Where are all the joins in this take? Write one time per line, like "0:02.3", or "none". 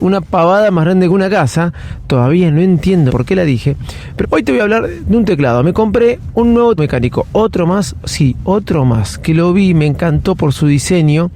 0:03.1
0:04.2
0:06.8